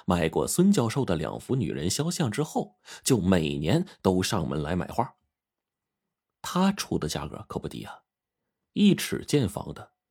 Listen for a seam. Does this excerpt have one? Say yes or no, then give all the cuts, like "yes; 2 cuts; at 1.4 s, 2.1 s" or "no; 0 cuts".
no; 0 cuts